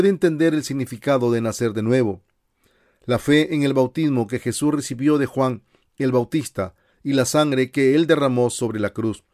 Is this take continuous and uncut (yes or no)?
yes